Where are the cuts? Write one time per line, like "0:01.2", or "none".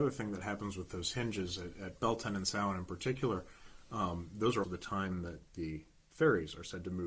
0:04.6